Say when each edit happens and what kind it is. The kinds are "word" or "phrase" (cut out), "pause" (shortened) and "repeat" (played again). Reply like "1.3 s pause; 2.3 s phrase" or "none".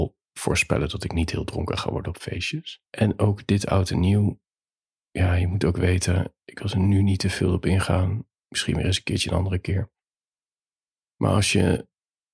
2.9 s pause; 8.4 s pause